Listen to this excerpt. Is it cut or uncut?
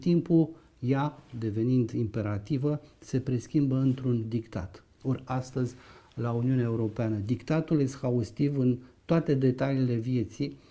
cut